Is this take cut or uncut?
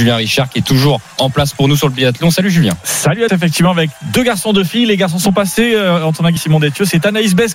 cut